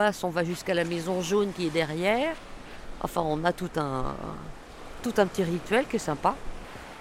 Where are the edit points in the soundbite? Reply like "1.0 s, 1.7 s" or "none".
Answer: none